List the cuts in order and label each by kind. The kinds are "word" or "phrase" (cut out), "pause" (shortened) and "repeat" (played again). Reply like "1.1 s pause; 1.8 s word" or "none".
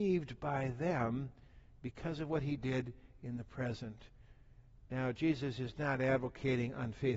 none